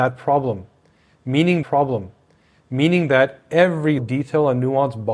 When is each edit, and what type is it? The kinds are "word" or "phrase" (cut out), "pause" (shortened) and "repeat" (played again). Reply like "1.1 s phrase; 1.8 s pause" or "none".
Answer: 1.6 s repeat; 4.0 s word